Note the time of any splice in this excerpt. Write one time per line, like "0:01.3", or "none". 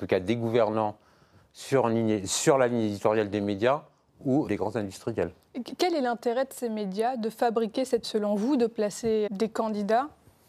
0:04.5
0:08.0
0:09.3